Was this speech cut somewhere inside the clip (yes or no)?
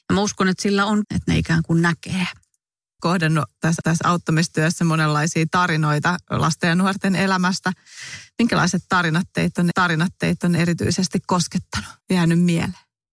yes